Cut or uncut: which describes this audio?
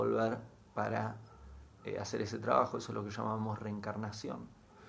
cut